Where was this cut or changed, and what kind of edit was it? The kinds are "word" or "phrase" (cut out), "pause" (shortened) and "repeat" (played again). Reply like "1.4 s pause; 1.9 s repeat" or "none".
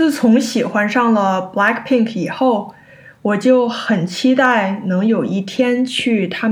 none